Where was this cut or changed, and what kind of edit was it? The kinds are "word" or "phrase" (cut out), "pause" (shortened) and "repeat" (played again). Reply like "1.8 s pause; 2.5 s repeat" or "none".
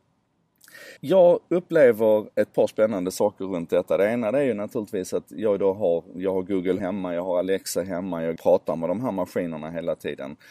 1.0 s pause; 2.3 s pause; 6.8 s word; 8.4 s phrase